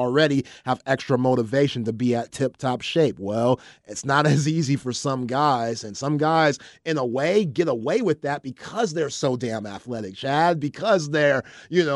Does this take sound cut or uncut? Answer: uncut